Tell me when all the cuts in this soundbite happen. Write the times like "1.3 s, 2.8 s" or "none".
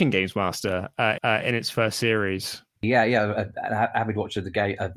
1.2 s, 2.7 s